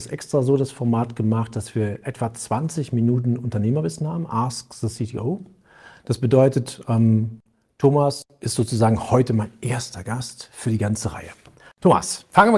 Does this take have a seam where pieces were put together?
no; 0 cuts

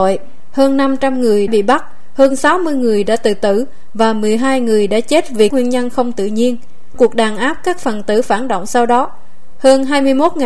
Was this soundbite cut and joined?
yes; 3 cuts; at 1.5 s, 5.5 s, 7.0 s

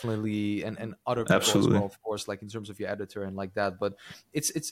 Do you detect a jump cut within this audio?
no; 0 cuts

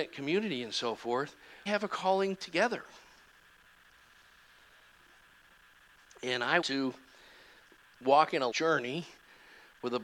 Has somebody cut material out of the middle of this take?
yes; 3 cuts; at 1.7 s, 6.6 s, 8.5 s

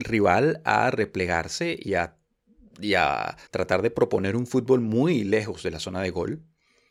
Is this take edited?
yes; 1 cut; at 3.5 s

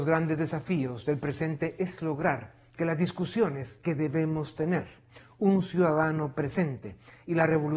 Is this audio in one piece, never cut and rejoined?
yes; 0 cuts

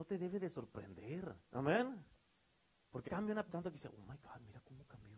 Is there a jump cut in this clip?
yes; 3 cuts; at 1.5 s, 3.1 s, 3.5 s

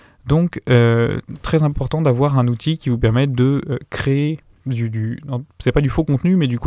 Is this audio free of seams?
yes; 0 cuts

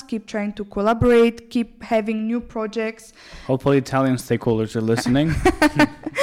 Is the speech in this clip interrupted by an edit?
no; 0 cuts

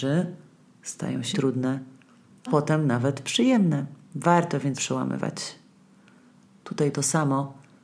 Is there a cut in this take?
yes; 4 cuts; at 1.3 s, 2.5 s, 4.7 s, 6.9 s

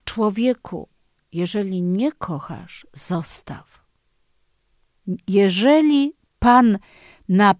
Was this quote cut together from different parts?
no; 0 cuts

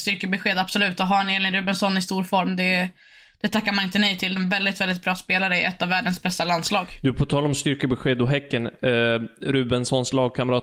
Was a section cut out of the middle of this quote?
yes; 1 cut; at 4.4 s

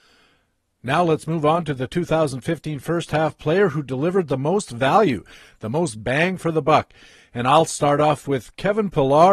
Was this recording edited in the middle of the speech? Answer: no; 0 cuts

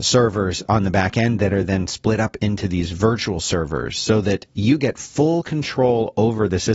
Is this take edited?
no; 0 cuts

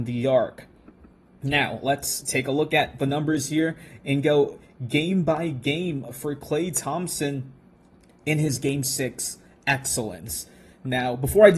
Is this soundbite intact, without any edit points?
yes; 0 cuts

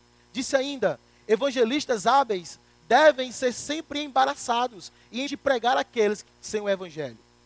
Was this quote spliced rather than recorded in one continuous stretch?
yes; 2 cuts; at 5.3 s, 6.3 s

